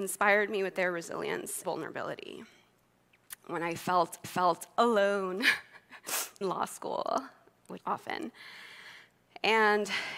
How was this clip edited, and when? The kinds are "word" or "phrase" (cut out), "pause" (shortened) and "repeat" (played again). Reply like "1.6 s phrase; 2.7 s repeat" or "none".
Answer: 1.6 s word; 4.2 s repeat; 6.4 s word; 7.8 s word